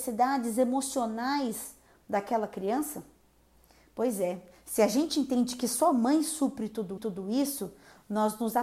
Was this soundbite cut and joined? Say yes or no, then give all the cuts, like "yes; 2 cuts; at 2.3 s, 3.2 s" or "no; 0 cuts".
yes; 1 cut; at 7.0 s